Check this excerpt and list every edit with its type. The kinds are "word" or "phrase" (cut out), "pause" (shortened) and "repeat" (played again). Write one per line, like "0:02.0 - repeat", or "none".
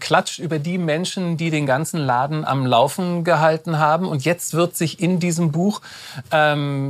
none